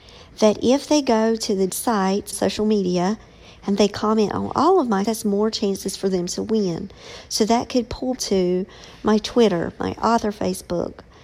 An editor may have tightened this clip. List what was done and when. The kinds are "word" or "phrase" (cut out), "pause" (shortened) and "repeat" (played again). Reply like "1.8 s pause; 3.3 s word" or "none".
1.7 s word; 2.3 s word; 5.0 s word; 8.2 s word